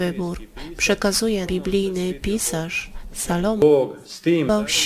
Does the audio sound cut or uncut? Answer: cut